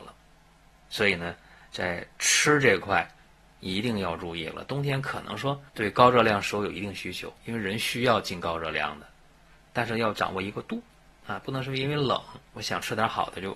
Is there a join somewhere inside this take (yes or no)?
yes